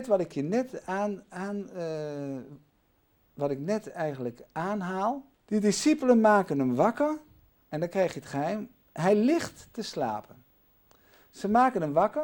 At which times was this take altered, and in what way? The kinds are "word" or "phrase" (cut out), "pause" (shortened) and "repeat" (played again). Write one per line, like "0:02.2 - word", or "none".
0:05.3 - pause

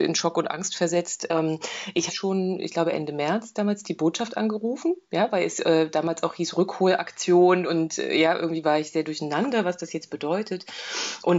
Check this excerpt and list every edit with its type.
0:02.1 - phrase

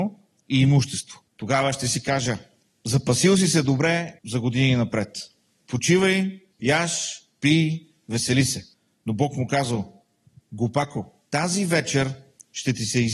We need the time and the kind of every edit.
0:01.3 - pause
0:02.6 - pause
0:04.2 - pause
0:06.5 - pause
0:08.7 - pause
0:11.2 - pause

